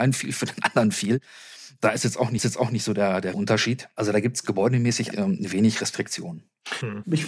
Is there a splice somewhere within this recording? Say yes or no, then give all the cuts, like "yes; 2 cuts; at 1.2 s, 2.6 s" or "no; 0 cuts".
yes; 3 cuts; at 2.4 s, 3.3 s, 5.1 s